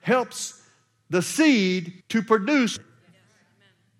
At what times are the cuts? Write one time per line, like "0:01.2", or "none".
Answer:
0:02.0
0:02.8